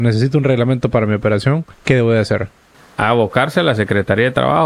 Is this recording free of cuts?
no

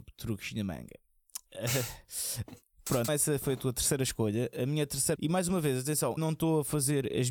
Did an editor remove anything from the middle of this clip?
yes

